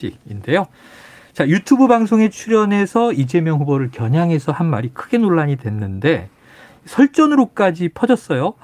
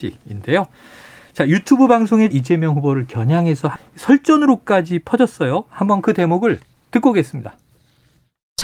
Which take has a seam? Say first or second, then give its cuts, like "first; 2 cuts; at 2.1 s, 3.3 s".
second; 2 cuts; at 2.3 s, 3.8 s